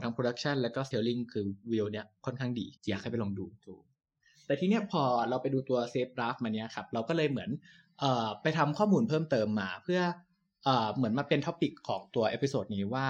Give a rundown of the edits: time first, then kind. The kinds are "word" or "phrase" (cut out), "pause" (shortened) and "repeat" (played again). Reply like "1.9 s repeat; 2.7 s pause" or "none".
0.9 s phrase; 2.8 s pause